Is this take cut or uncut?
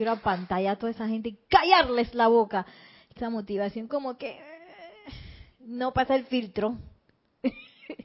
cut